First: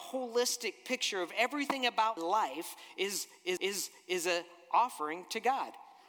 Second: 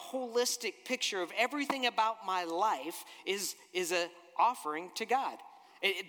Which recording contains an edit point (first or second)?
first